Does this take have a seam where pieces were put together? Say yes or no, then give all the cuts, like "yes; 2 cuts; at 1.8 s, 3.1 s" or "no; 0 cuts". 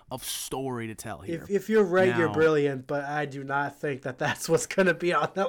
no; 0 cuts